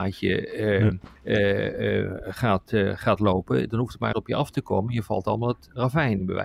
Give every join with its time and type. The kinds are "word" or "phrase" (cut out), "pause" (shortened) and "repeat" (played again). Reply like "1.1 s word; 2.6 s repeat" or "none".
1.2 s pause; 4.1 s phrase